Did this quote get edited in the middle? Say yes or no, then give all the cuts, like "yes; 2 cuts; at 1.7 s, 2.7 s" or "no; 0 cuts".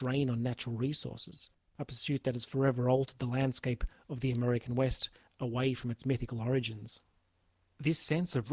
no; 0 cuts